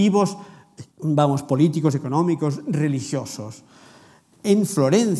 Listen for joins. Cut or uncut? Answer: cut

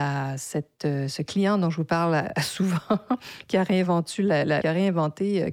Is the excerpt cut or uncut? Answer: cut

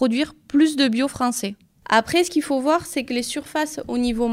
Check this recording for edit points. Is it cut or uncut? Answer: uncut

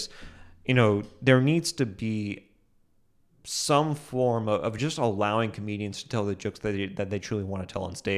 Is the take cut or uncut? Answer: uncut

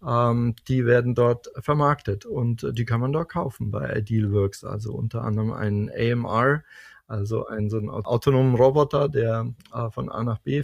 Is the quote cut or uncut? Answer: uncut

